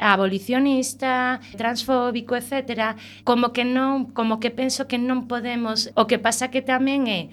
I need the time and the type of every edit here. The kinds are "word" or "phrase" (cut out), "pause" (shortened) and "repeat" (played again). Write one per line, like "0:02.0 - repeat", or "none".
0:01.5 - word
0:03.2 - word
0:05.9 - phrase